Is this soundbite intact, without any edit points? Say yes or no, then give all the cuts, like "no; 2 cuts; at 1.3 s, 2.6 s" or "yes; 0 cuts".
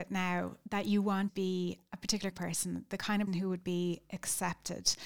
no; 3 cuts; at 1.3 s, 2.3 s, 3.3 s